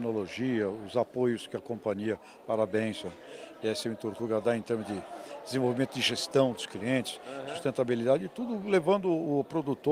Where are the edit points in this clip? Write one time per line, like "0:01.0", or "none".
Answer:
none